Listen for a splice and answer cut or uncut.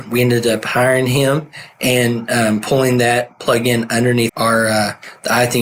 cut